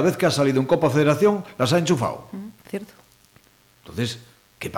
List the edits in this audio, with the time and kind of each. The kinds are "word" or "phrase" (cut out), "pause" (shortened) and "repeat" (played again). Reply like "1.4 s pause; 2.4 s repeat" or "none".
2.6 s pause

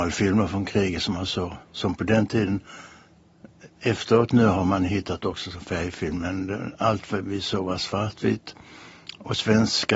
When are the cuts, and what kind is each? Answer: 1.6 s pause

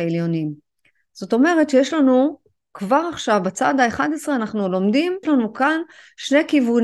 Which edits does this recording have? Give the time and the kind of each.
5.2 s word

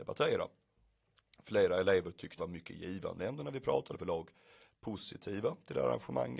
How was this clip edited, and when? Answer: 2.4 s phrase; 3.9 s phrase

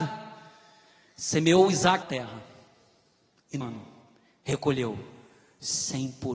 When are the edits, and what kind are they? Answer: 2.0 s word; 3.6 s word

